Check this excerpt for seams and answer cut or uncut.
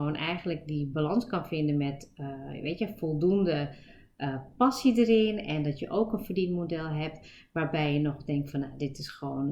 uncut